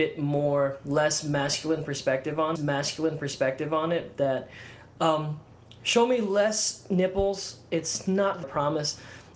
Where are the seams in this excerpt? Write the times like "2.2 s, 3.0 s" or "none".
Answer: 2.6 s, 8.4 s